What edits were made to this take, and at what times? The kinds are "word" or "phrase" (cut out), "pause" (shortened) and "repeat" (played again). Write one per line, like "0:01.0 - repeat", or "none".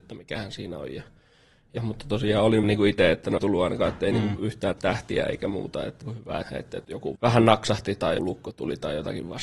0:01.8 - word
0:02.6 - word
0:03.4 - word
0:04.7 - word
0:06.0 - word
0:06.4 - word
0:06.8 - word
0:07.2 - word
0:08.2 - word

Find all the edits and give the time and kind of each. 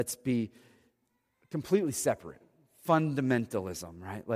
none

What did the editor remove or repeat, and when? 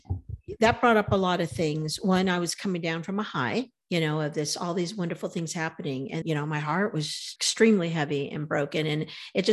0:06.2 - word
0:07.4 - word

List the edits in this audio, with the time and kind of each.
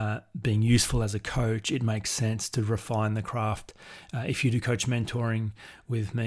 none

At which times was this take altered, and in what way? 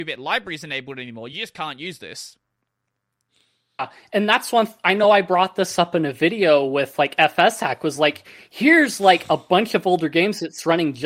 none

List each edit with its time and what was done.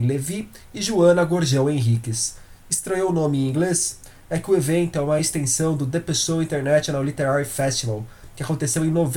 none

